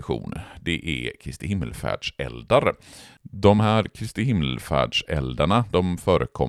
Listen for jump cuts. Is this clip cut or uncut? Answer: uncut